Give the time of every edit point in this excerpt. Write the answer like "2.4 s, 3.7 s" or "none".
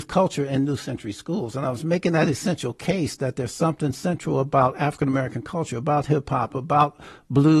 none